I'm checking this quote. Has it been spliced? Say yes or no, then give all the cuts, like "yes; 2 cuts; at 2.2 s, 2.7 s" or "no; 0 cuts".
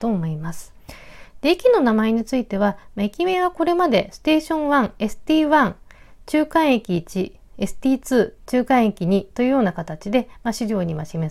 no; 0 cuts